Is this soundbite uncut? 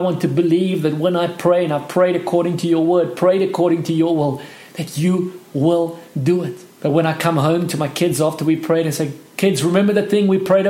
no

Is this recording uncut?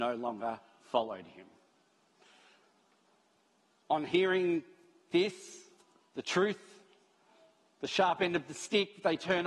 yes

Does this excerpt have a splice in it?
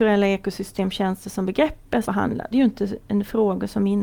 yes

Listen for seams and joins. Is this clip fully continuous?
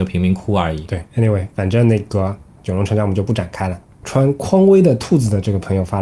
no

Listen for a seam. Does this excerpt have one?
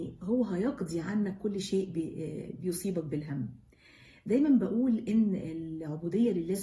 no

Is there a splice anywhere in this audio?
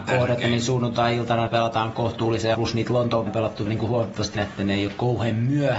yes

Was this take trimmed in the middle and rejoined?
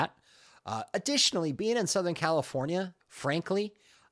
yes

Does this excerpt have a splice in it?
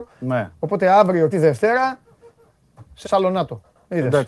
yes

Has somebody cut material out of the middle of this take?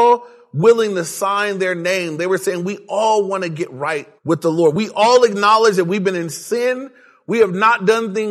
yes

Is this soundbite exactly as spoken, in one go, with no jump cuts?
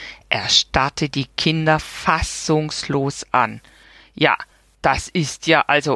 yes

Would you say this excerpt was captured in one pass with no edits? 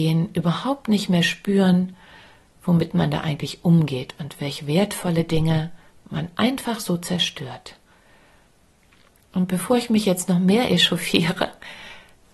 yes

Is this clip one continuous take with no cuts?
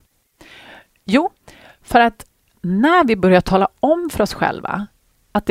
yes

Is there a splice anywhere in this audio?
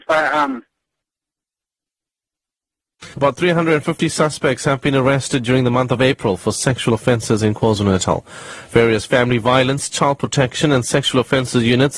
yes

